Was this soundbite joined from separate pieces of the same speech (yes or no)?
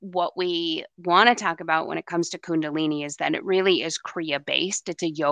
no